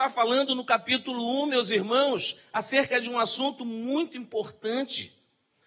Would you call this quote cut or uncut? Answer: uncut